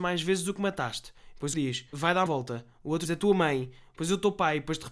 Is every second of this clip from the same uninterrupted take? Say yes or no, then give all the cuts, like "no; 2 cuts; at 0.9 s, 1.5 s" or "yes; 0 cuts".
no; 4 cuts; at 1.5 s, 1.9 s, 2.3 s, 3.0 s